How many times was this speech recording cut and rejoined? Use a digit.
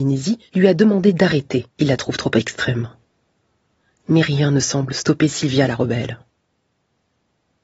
1